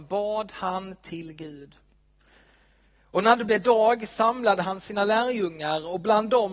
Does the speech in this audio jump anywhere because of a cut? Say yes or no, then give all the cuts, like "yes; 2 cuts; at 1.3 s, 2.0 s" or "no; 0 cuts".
no; 0 cuts